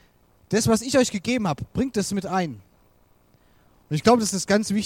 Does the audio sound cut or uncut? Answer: uncut